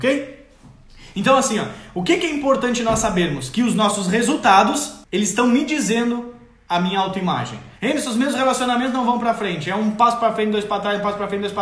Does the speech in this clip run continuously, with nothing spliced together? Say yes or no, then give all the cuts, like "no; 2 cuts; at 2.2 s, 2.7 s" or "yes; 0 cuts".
no; 2 cuts; at 5.0 s, 7.8 s